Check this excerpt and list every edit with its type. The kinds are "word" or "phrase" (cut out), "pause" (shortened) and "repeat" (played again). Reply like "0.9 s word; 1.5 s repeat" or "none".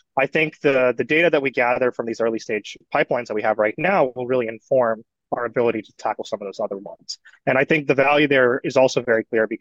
none